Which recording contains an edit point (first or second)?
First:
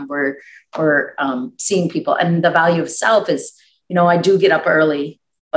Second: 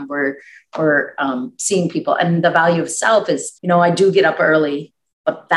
second